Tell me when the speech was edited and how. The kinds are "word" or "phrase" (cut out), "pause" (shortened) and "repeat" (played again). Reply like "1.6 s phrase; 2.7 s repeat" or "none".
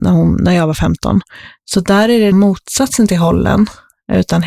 2.3 s word